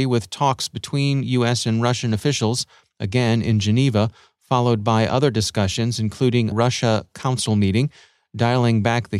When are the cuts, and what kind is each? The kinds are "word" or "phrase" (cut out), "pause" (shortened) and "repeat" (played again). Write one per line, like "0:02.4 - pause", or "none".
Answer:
0:06.5 - phrase